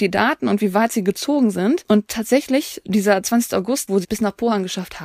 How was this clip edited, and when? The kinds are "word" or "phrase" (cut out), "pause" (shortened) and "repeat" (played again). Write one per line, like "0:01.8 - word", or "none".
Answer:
0:04.0 - word

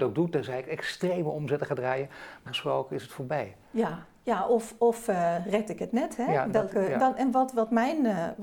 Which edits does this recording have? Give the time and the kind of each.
0:02.5 - word
0:03.6 - pause

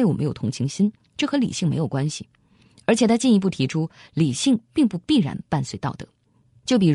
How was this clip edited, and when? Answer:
none

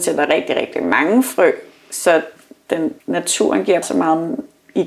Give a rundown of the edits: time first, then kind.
0:03.0 - pause
0:03.8 - word

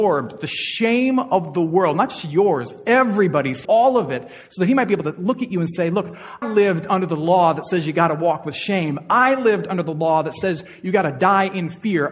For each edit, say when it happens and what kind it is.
0:03.6 - word
0:06.4 - word

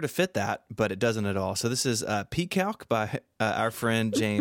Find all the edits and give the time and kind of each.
none

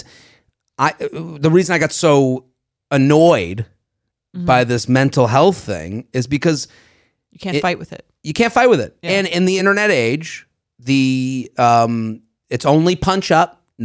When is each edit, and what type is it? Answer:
none

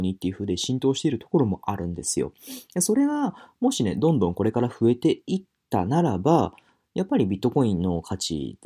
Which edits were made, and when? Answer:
none

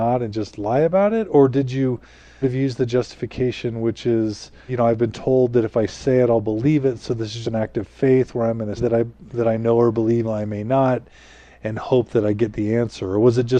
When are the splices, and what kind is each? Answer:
0:02.4 - word
0:04.7 - word
0:07.4 - word
0:08.8 - word
0:10.2 - word

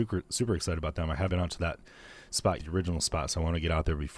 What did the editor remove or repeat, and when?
0:01.3 - word
0:02.6 - word

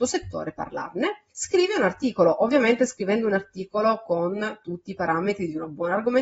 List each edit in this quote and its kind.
0:01.3 - pause

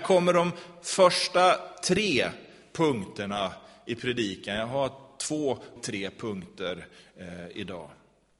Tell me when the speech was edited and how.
0:05.8 - word

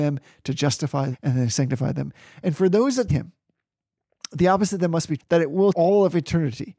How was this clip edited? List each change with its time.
0:01.1 - word
0:03.1 - word
0:05.2 - word
0:05.7 - word

